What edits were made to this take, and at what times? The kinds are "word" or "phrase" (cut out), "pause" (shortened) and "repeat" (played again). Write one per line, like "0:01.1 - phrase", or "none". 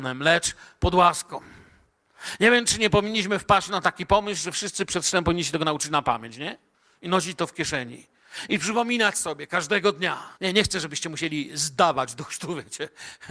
0:06.7 - pause
0:10.4 - pause